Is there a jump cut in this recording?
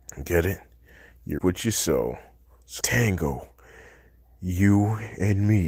yes; 2 cuts; at 1.4 s, 2.8 s

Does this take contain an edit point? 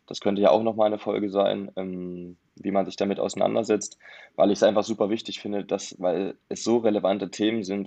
no; 0 cuts

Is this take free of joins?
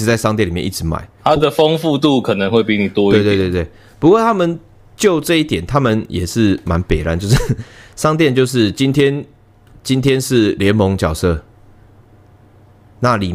yes; 0 cuts

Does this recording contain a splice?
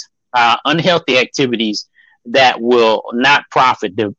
no; 0 cuts

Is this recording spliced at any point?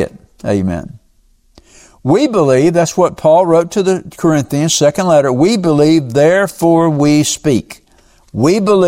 no; 0 cuts

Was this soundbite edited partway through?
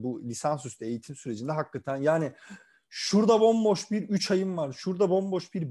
no; 0 cuts

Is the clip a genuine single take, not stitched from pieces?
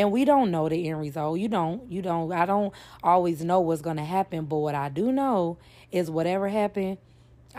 yes; 0 cuts

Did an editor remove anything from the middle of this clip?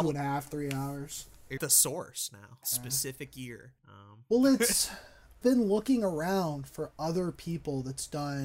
yes; 4 cuts; at 1.6 s, 2.6 s, 3.8 s, 5.4 s

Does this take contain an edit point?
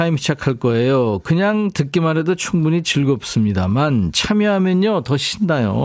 no; 0 cuts

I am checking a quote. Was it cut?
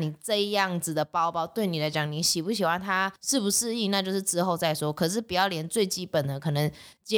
yes; 1 cut; at 3.2 s

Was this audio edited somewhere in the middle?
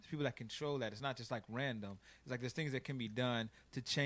no; 0 cuts

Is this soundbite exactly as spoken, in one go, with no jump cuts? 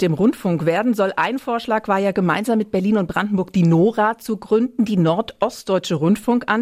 yes; 0 cuts

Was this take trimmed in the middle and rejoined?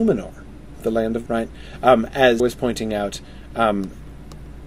yes; 2 cuts; at 1.3 s, 2.4 s

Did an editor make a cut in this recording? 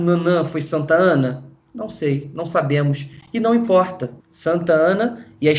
yes; 1 cut; at 4.2 s

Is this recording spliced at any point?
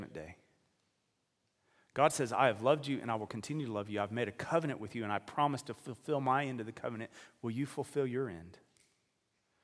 no; 0 cuts

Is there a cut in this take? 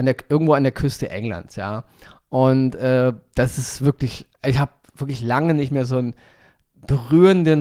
no; 0 cuts

